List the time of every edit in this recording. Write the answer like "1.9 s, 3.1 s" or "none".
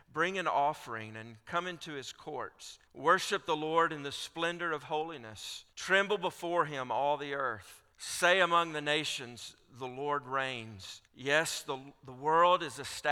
2.9 s, 5.7 s, 7.9 s, 11.1 s